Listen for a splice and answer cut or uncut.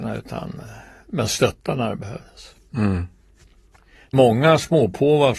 cut